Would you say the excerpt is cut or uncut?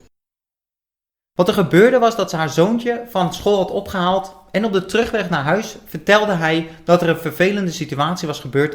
uncut